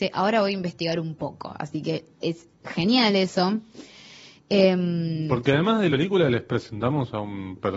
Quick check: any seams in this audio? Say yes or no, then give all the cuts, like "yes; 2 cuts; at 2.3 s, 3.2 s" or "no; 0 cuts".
yes; 1 cut; at 5.9 s